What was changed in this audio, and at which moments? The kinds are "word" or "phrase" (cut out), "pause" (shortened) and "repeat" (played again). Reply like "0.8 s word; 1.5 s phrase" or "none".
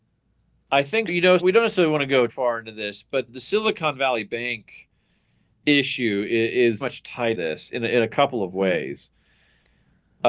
1.1 s word; 1.4 s word; 2.3 s word; 3.3 s word; 6.8 s word; 7.3 s word